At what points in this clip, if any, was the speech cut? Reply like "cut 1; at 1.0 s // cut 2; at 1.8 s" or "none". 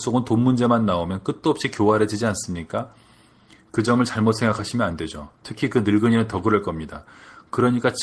none